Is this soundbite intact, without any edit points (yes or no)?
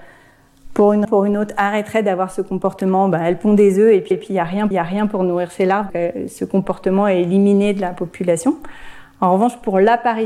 no